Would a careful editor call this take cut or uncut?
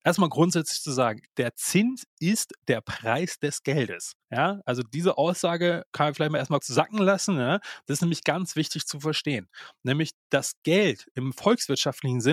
cut